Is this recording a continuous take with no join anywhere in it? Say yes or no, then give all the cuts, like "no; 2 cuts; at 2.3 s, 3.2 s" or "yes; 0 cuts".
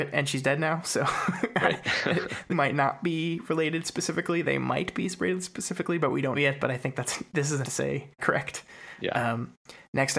no; 4 cuts; at 2.5 s, 6.3 s, 7.6 s, 8.2 s